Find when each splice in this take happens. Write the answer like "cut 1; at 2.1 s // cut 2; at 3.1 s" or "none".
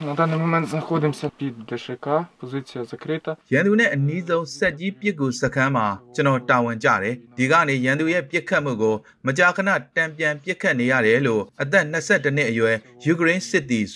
cut 1; at 1.3 s // cut 2; at 3.4 s // cut 3; at 7.3 s // cut 4; at 11.5 s

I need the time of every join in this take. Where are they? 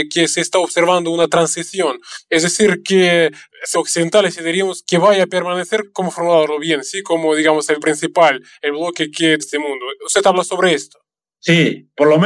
cut 1; at 3.7 s // cut 2; at 7.8 s // cut 3; at 9.4 s

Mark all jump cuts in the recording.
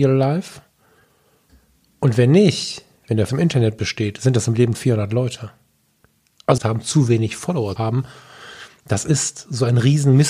cut 1; at 3.3 s // cut 2; at 4.7 s // cut 3; at 6.6 s // cut 4; at 7.8 s

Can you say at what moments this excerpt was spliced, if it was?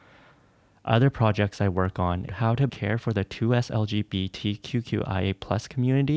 cut 1; at 2.3 s // cut 2; at 2.7 s

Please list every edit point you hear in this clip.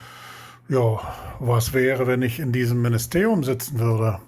none

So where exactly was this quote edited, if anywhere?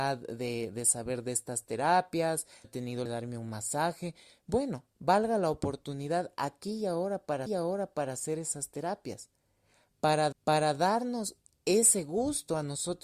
cut 1; at 2.6 s // cut 2; at 3.1 s // cut 3; at 4.9 s // cut 4; at 7.5 s // cut 5; at 10.3 s

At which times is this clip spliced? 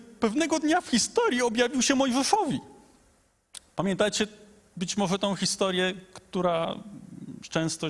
none

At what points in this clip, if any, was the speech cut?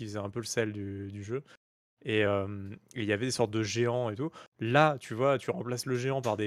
none

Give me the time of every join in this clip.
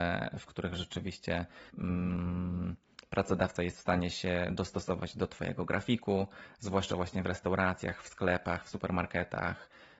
cut 1; at 1.7 s

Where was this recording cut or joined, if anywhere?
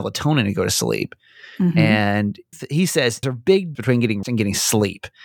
cut 1; at 2.5 s // cut 2; at 3.2 s // cut 3; at 3.7 s // cut 4; at 4.2 s

